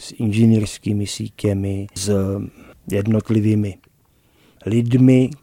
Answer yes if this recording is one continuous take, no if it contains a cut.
yes